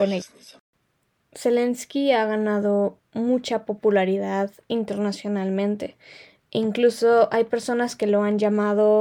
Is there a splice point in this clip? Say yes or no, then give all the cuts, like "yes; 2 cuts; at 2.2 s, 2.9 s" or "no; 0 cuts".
yes; 1 cut; at 3.1 s